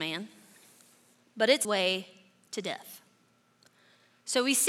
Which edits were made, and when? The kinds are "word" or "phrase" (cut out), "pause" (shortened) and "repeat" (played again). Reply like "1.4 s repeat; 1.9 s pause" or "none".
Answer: 1.6 s phrase